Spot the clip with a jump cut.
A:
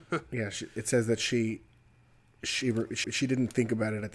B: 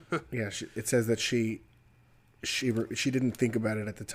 A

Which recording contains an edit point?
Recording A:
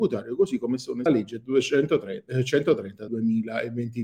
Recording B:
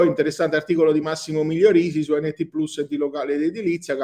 A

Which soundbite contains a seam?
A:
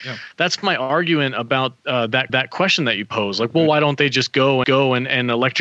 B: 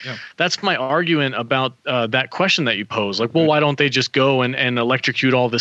A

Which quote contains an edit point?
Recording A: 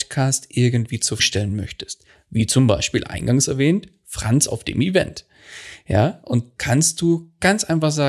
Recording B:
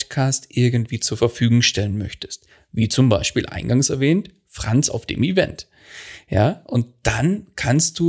A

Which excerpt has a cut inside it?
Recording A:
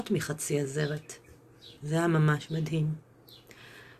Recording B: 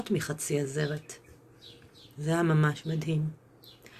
A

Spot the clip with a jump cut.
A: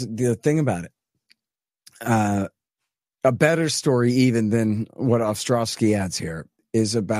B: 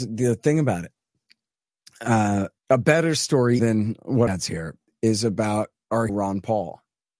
B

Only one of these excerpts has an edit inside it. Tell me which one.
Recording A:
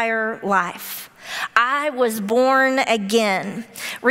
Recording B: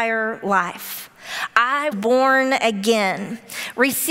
B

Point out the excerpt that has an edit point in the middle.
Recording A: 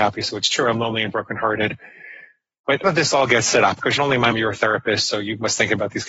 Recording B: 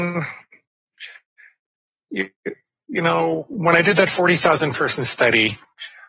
A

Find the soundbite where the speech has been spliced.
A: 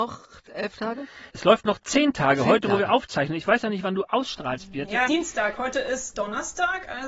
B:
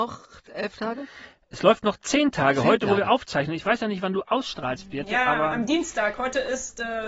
A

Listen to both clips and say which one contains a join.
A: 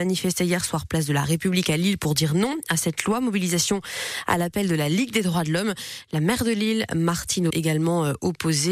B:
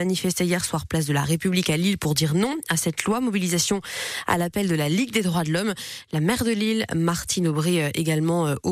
A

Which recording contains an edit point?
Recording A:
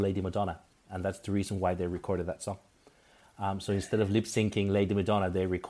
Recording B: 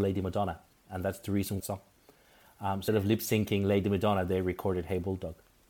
B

